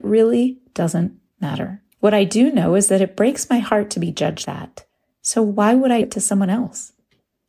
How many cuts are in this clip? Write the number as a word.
three